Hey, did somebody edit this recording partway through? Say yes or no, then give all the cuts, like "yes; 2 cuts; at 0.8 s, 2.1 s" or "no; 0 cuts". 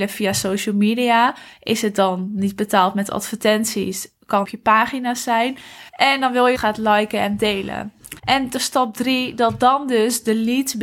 yes; 4 cuts; at 4.4 s, 5.9 s, 6.5 s, 8.2 s